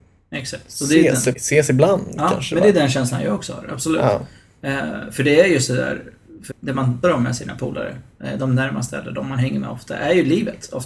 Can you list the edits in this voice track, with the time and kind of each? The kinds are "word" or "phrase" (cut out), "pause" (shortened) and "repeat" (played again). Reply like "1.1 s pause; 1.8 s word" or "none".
1.3 s word; 6.5 s word; 7.0 s word